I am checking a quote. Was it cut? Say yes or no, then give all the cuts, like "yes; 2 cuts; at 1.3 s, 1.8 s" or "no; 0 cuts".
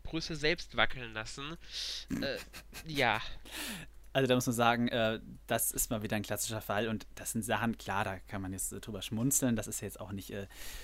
no; 0 cuts